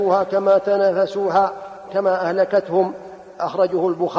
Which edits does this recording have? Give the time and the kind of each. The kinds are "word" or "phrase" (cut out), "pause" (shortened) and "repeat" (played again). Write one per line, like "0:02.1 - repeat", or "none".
0:01.9 - word